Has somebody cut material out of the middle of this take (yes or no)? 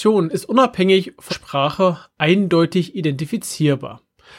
yes